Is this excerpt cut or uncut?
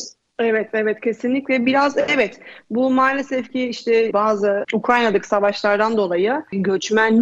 uncut